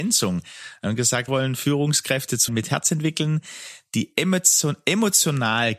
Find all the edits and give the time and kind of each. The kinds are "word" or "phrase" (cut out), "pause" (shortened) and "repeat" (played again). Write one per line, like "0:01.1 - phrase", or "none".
0:01.3 - phrase
0:02.5 - word